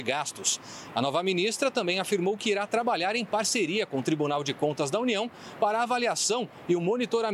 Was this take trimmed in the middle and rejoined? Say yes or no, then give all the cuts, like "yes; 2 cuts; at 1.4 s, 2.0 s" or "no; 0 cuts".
no; 0 cuts